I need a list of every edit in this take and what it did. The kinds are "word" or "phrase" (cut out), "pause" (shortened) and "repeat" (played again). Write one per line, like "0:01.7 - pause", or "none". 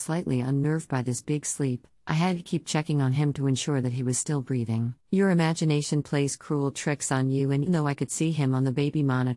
0:05.0 - pause
0:07.7 - word